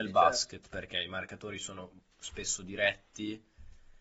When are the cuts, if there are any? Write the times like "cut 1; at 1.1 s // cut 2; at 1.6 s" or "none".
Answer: none